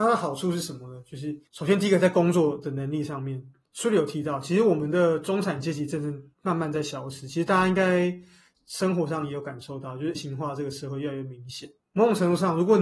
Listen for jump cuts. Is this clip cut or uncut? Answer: cut